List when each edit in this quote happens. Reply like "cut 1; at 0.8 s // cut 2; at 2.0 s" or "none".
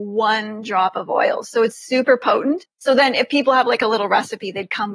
none

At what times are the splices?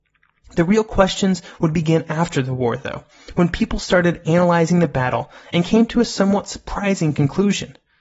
none

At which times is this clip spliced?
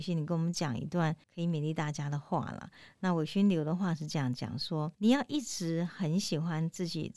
cut 1; at 1.2 s // cut 2; at 4.9 s

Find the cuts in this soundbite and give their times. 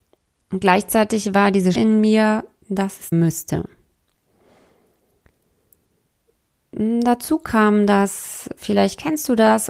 cut 1; at 1.7 s // cut 2; at 3.1 s

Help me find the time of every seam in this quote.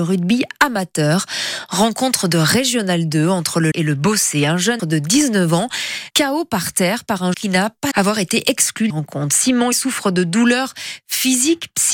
cut 1; at 3.7 s // cut 2; at 4.8 s // cut 3; at 6.1 s // cut 4; at 7.3 s // cut 5; at 7.9 s // cut 6; at 8.9 s // cut 7; at 9.7 s

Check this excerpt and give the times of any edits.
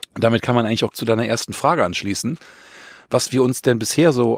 cut 1; at 0.9 s

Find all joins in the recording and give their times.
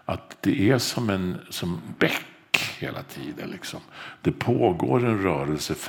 cut 1; at 2.0 s

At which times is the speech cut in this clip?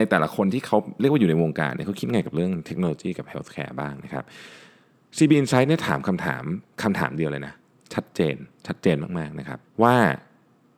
cut 1; at 9.6 s

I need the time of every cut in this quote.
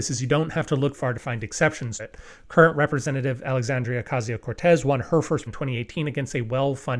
cut 1; at 0.9 s // cut 2; at 2.0 s // cut 3; at 5.5 s

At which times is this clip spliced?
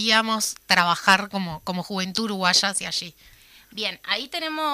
none

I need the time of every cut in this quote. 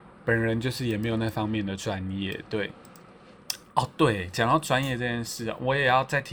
none

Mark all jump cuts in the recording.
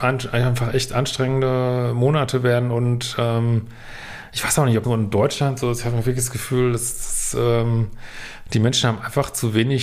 cut 1; at 4.8 s

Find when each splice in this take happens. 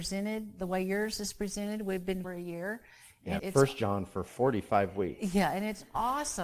cut 1; at 2.2 s // cut 2; at 3.4 s

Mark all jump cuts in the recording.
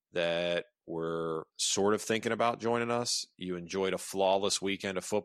cut 1; at 1.5 s

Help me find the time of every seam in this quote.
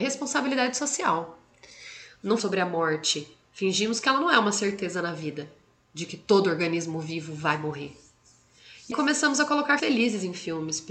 cut 1; at 2.4 s // cut 2; at 8.9 s // cut 3; at 9.8 s

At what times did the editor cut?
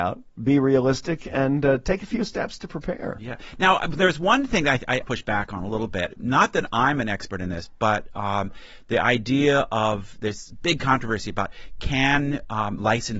cut 1; at 5.0 s

